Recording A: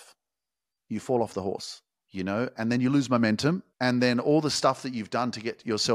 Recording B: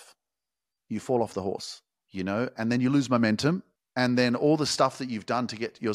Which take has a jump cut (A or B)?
A